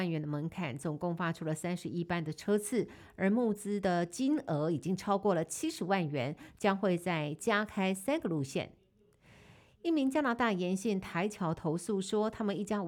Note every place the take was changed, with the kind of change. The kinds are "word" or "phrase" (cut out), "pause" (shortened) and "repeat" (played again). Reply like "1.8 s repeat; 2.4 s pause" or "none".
none